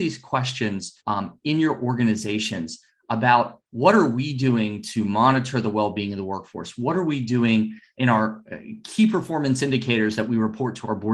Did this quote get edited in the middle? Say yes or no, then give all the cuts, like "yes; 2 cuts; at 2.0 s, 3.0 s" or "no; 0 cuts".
yes; 1 cut; at 1.0 s